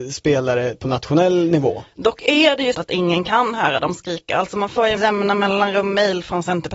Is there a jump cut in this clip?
yes; 2 cuts; at 2.7 s, 5.0 s

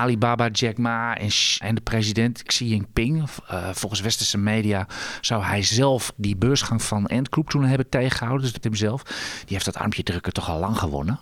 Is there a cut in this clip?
yes; 4 cuts; at 1.6 s, 2.5 s, 6.1 s, 8.6 s

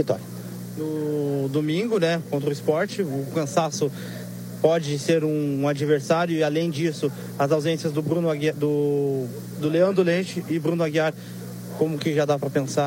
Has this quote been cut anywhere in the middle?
no; 0 cuts

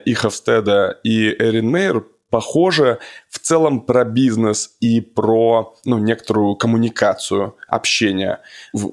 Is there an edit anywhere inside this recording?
no; 0 cuts

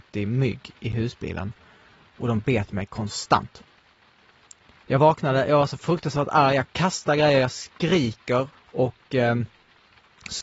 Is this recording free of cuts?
no; 1 cut; at 8.5 s

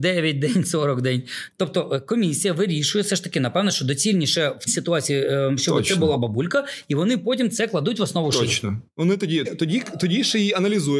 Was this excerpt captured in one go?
no; 2 cuts; at 4.7 s, 9.4 s

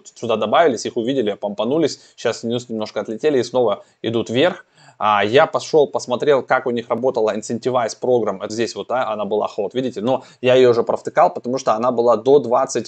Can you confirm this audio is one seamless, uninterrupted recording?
no; 1 cut; at 8.5 s

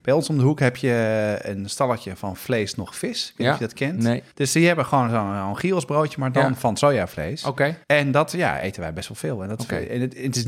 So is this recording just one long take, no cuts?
no; 2 cuts; at 4.3 s, 7.8 s

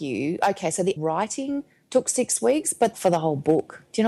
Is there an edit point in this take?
yes; 2 cuts; at 1.0 s, 2.9 s

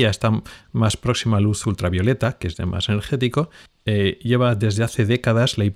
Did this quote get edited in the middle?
yes; 1 cut; at 3.7 s

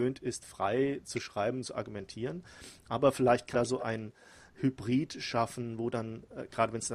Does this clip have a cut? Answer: yes; 1 cut; at 3.5 s

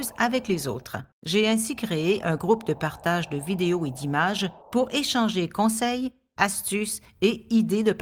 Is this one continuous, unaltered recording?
no; 2 cuts; at 1.1 s, 4.6 s

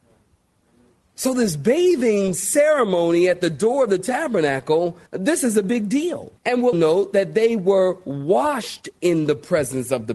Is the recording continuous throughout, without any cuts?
no; 3 cuts; at 5.1 s, 6.4 s, 6.7 s

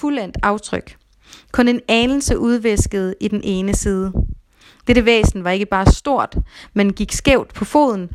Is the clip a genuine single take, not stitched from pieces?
yes; 0 cuts

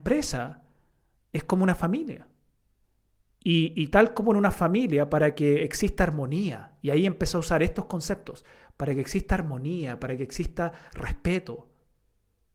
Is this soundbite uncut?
yes; 0 cuts

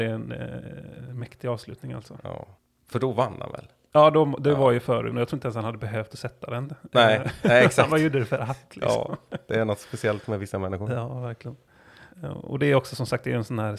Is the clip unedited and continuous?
no; 3 cuts; at 2.6 s, 5.1 s, 12.1 s

